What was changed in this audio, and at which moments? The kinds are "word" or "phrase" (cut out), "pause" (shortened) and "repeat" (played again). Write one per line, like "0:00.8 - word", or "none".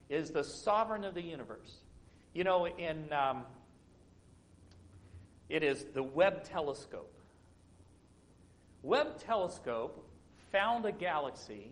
none